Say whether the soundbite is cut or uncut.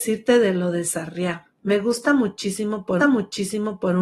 cut